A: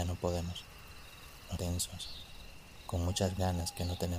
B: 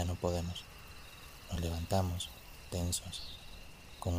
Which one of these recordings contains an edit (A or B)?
A